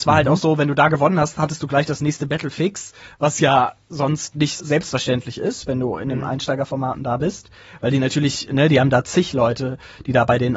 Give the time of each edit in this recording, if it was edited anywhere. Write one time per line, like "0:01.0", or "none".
0:04.6